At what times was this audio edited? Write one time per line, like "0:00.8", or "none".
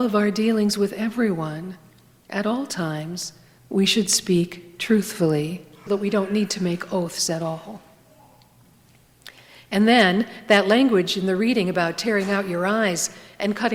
0:05.9